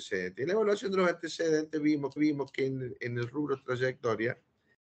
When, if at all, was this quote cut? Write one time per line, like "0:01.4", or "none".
0:02.2